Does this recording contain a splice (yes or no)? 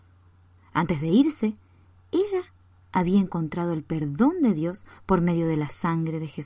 no